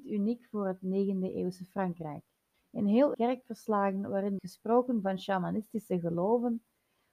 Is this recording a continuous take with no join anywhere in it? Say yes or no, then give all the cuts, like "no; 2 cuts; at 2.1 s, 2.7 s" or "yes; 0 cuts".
no; 3 cuts; at 2.5 s, 3.1 s, 4.4 s